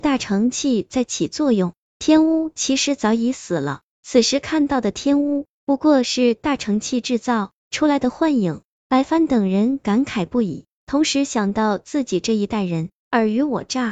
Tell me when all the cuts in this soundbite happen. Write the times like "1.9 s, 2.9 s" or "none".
7.6 s